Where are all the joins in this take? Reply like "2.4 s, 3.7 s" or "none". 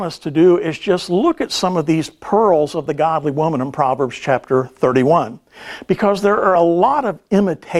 none